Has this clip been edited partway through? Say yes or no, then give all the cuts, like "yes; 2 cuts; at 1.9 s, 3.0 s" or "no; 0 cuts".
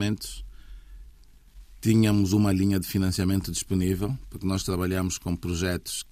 no; 0 cuts